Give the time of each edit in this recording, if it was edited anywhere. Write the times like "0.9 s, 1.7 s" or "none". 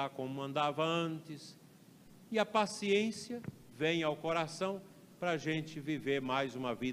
none